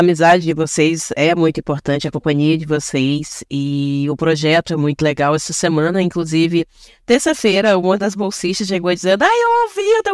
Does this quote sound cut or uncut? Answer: uncut